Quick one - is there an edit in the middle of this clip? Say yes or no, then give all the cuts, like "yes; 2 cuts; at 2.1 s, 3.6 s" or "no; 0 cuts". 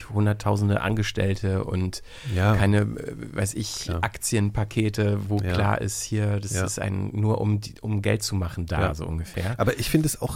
no; 0 cuts